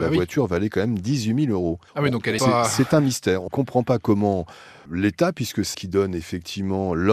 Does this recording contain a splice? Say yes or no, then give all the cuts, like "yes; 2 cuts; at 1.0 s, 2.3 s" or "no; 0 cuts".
yes; 5 cuts; at 1.9 s, 2.4 s, 3.5 s, 4.9 s, 5.7 s